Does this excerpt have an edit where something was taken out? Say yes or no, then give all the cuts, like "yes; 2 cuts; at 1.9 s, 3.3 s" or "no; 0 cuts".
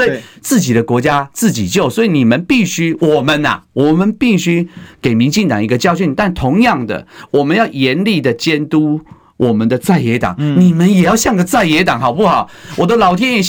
no; 0 cuts